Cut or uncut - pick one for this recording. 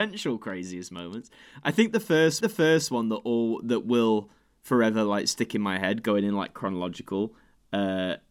cut